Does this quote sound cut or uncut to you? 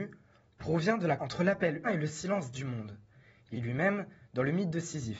cut